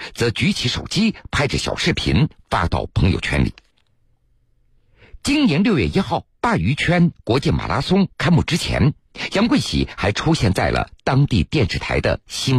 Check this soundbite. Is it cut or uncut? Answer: cut